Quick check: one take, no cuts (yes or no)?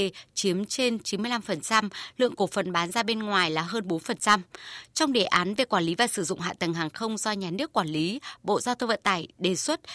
yes